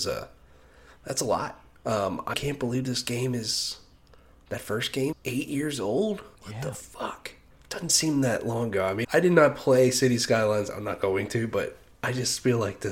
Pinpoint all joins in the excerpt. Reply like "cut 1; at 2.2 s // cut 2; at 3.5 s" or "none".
cut 1; at 2.3 s // cut 2; at 4.3 s // cut 3; at 5.1 s // cut 4; at 6.4 s // cut 5; at 7.5 s // cut 6; at 9.0 s